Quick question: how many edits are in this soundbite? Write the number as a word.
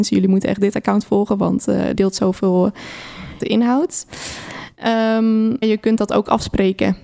three